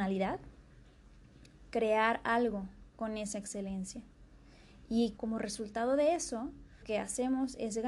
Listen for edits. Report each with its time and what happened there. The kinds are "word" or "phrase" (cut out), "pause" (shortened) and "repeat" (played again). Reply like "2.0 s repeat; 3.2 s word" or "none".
2.9 s pause; 5.2 s word; 6.8 s word